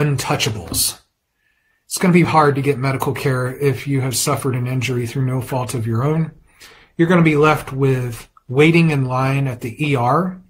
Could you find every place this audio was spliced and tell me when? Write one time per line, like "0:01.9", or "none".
0:02.2